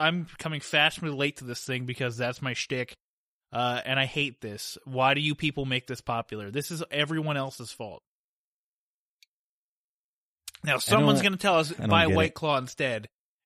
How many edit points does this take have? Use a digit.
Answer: 0